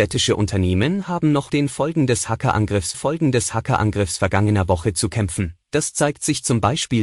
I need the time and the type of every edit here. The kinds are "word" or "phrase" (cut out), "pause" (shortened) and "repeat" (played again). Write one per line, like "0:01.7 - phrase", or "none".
0:01.5 - word
0:02.9 - repeat
0:05.6 - pause